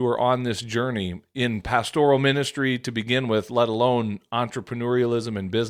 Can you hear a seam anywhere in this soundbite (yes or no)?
no